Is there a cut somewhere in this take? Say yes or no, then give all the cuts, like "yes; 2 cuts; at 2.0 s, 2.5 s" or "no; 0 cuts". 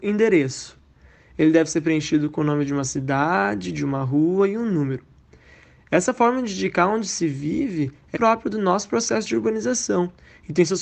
yes; 1 cut; at 8.2 s